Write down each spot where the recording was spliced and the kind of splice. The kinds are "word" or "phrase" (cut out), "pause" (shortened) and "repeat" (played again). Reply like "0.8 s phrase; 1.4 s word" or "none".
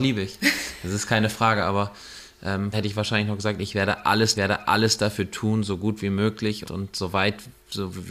2.7 s phrase; 4.3 s repeat; 6.6 s word